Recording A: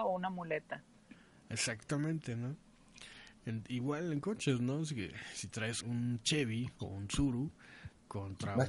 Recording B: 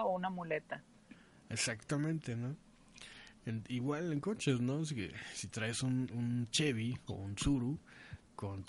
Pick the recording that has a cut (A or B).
A